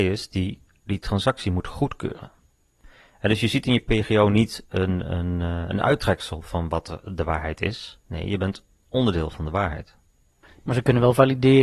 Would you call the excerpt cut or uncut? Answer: uncut